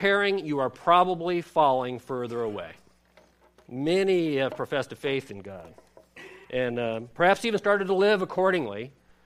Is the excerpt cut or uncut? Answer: cut